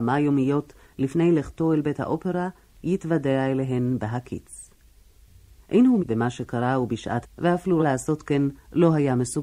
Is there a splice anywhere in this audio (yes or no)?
yes